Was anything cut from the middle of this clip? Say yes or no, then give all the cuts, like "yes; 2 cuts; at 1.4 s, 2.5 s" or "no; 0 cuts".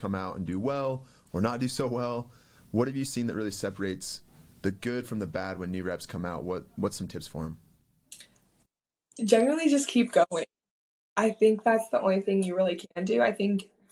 no; 0 cuts